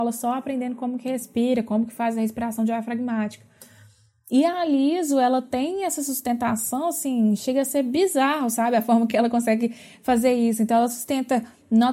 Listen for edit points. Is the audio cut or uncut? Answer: uncut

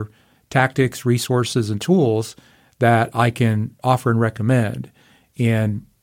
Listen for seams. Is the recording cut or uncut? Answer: uncut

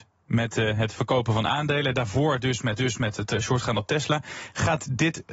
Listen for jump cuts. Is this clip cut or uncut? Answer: cut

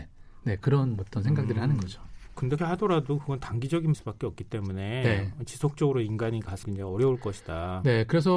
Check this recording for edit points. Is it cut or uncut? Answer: cut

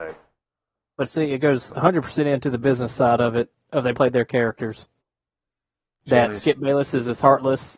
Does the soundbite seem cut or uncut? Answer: cut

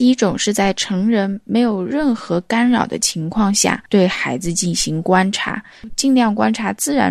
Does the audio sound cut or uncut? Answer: cut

